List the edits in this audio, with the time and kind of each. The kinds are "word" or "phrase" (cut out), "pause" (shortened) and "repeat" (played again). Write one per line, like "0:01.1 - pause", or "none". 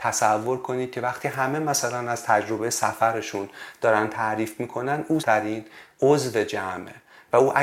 0:05.2 - word